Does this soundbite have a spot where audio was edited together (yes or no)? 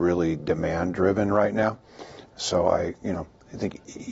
no